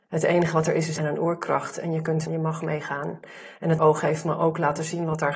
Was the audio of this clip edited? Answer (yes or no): yes